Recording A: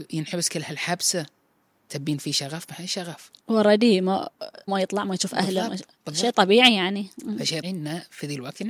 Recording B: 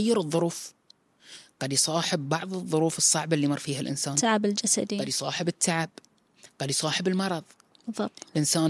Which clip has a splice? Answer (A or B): A